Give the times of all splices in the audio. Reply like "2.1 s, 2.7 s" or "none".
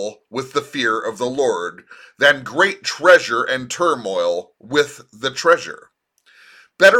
none